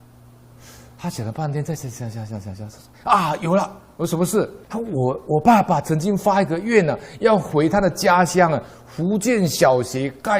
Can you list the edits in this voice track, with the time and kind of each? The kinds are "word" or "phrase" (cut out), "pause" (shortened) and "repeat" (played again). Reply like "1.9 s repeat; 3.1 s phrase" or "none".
4.6 s pause